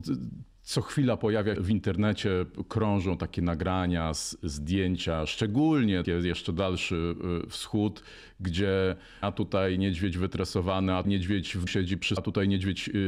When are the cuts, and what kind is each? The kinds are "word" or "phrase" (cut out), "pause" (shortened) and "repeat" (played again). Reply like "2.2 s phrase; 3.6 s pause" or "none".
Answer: 1.6 s word; 6.0 s word; 9.2 s word; 11.0 s word; 11.7 s word; 12.2 s word